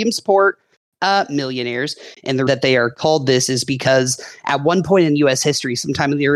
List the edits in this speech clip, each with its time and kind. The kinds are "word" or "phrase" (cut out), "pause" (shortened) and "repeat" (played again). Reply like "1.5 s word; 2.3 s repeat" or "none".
2.5 s word